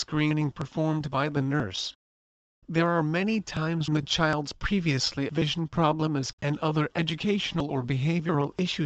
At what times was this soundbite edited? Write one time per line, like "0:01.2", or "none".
0:03.9
0:05.3
0:06.3